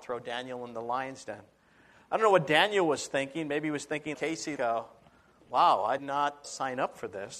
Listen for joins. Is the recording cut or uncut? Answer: cut